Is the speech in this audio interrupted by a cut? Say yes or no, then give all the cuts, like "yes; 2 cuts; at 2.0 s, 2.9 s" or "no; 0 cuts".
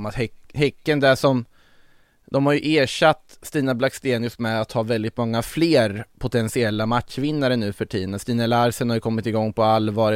no; 0 cuts